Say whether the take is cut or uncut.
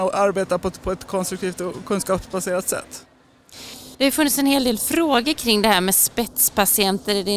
cut